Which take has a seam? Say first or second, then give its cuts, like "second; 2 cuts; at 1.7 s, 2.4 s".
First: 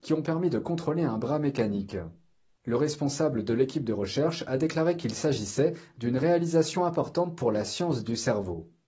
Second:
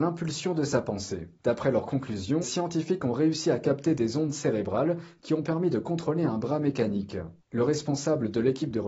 second; 3 cuts; at 1.4 s, 2.4 s, 7.4 s